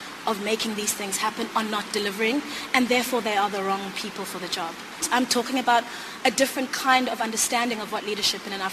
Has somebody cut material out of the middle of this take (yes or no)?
no